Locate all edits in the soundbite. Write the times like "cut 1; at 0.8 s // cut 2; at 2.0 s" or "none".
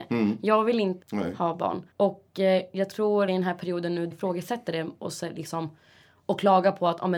cut 1; at 1.0 s // cut 2; at 1.9 s // cut 3; at 3.3 s // cut 4; at 4.1 s